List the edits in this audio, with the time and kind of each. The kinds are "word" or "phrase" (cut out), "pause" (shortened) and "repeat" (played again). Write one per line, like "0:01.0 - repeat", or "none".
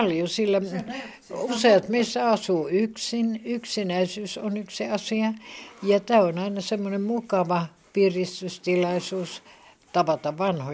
none